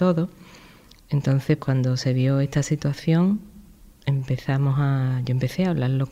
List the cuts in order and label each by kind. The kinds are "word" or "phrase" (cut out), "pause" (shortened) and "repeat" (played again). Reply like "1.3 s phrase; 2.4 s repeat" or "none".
1.6 s word